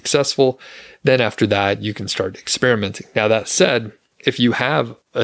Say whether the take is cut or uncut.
uncut